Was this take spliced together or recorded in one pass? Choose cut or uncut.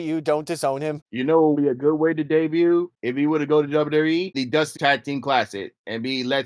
cut